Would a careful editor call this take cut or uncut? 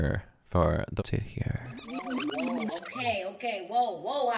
cut